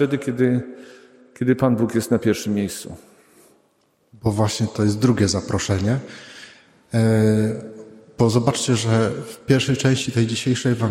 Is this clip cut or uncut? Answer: uncut